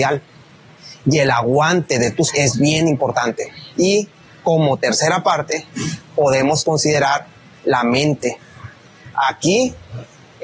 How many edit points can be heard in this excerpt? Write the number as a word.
two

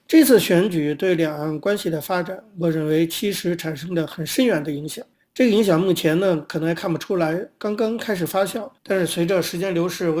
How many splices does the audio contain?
two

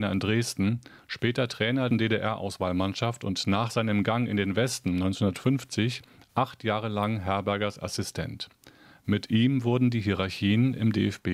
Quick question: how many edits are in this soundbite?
one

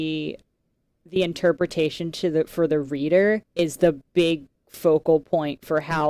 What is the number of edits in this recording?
one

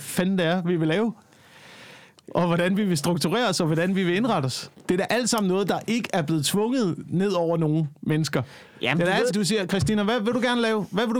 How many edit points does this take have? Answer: two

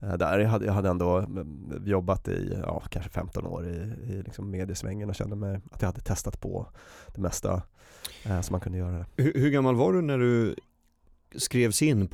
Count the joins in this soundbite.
zero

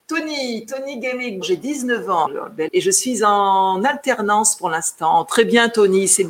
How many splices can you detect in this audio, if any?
three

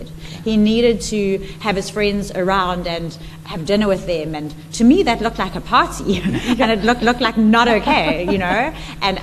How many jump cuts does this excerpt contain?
two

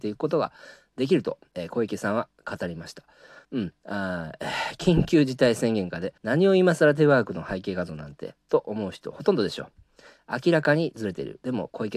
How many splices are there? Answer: two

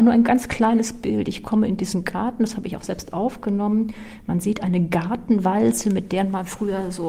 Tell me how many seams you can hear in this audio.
zero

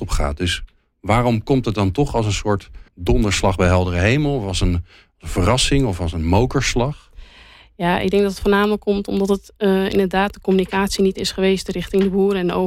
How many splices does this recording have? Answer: one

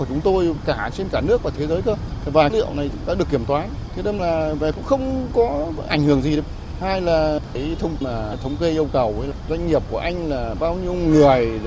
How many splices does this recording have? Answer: four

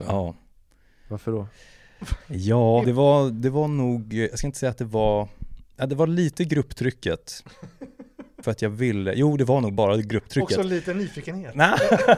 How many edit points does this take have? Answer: two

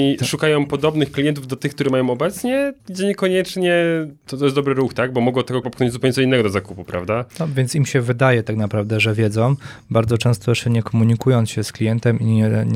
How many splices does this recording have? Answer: three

